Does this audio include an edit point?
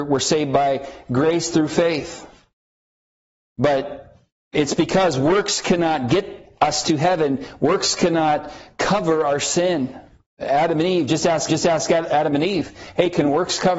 yes; 1 cut; at 11.5 s

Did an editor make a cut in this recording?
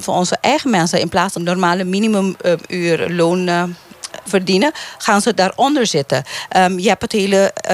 yes; 2 cuts; at 1.4 s, 4.3 s

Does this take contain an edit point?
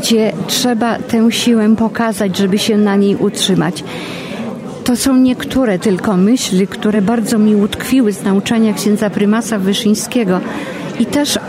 no; 0 cuts

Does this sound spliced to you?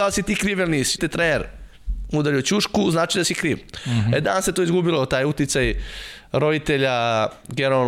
yes; 1 cut; at 1.0 s

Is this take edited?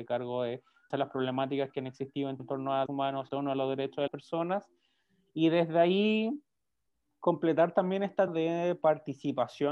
yes; 6 cuts; at 0.9 s, 2.4 s, 2.9 s, 3.3 s, 4.1 s, 8.3 s

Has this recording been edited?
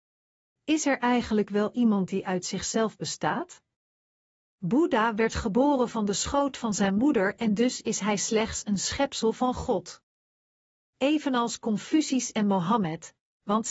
no; 0 cuts

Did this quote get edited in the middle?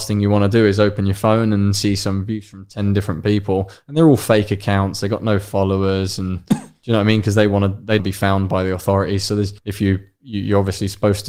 yes; 2 cuts; at 8.0 s, 9.6 s

